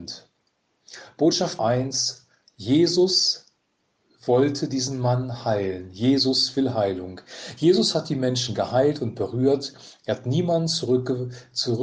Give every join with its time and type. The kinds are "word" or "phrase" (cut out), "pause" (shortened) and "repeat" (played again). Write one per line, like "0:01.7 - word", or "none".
0:01.6 - word